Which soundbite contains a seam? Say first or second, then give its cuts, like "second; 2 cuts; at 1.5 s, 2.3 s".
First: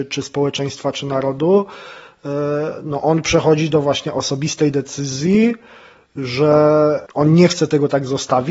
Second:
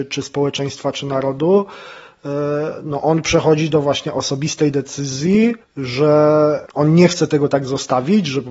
second; 1 cut; at 5.6 s